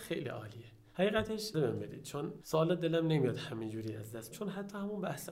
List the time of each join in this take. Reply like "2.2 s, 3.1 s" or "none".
1.5 s, 2.4 s, 4.3 s